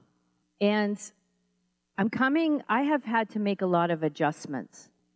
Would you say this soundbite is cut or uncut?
cut